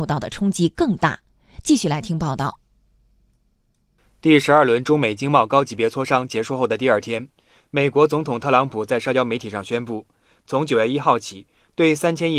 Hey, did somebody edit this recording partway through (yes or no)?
no